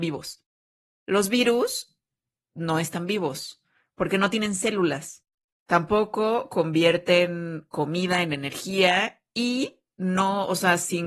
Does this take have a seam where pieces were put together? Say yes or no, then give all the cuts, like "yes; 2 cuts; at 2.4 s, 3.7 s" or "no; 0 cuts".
no; 0 cuts